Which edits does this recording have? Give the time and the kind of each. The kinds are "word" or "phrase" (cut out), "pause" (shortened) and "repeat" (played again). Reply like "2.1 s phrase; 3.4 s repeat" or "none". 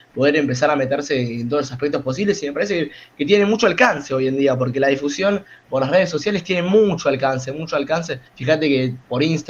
8.3 s pause